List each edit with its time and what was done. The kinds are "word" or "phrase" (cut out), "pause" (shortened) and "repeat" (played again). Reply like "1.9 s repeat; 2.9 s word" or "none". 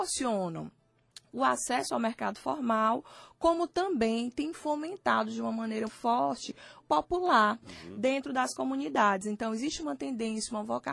5.9 s word; 6.8 s phrase

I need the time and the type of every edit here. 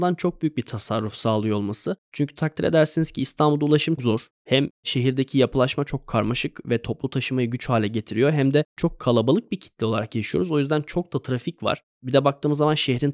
4.0 s word

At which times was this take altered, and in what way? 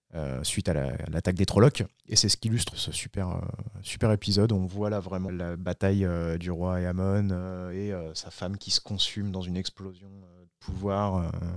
2.7 s word; 5.3 s word

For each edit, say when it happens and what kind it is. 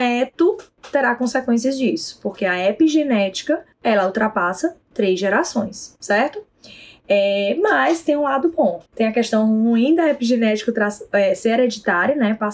3.7 s pause; 8.9 s pause

